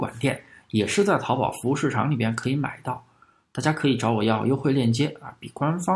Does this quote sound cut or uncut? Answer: uncut